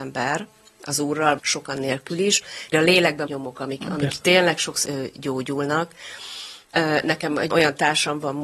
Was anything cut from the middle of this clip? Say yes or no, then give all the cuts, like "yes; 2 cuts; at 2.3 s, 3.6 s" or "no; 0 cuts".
yes; 7 cuts; at 1.4 s, 1.7 s, 2.7 s, 3.3 s, 4.8 s, 6.6 s, 7.5 s